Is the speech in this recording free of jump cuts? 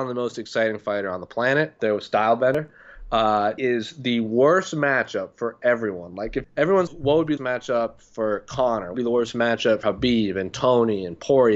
no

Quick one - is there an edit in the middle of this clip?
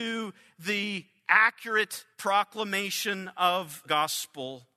yes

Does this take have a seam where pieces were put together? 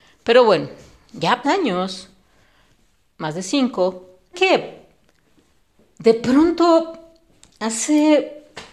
yes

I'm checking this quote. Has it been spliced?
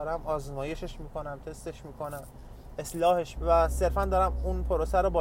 yes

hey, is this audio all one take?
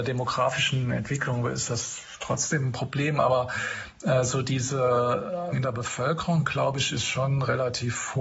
no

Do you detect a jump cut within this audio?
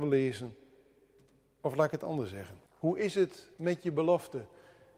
yes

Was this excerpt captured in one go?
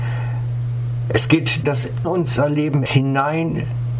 no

